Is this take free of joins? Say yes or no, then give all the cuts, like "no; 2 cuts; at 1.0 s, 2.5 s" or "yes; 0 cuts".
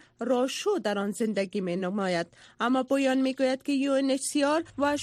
yes; 0 cuts